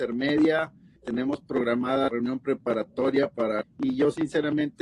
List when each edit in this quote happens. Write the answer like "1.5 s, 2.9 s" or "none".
1.0 s, 2.1 s, 3.6 s